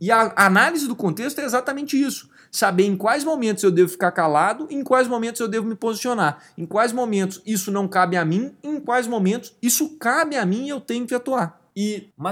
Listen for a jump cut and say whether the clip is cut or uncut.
uncut